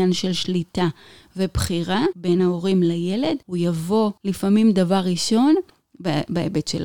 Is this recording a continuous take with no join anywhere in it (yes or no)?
yes